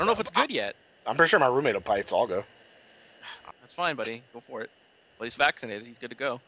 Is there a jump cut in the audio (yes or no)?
yes